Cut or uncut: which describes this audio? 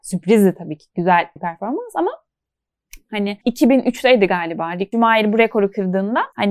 cut